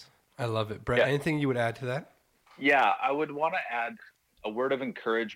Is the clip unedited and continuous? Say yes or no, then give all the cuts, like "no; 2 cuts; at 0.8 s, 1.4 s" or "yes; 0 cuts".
no; 2 cuts; at 3.0 s, 4.3 s